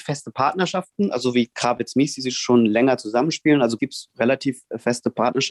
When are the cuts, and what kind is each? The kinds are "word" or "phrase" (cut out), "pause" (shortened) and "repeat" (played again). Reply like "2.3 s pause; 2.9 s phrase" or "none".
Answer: 3.8 s phrase